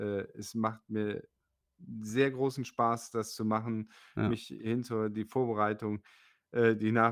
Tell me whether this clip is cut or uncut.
uncut